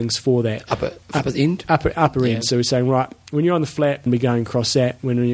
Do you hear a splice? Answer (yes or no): yes